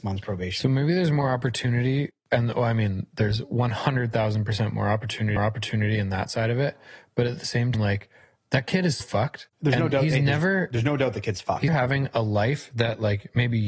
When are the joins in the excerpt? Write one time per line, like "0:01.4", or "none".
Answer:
0:05.4
0:07.7
0:09.0
0:09.5
0:11.7